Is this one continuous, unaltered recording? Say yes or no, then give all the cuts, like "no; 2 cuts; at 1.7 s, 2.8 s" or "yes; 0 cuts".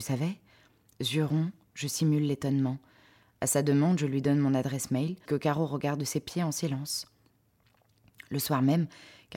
no; 1 cut; at 5.3 s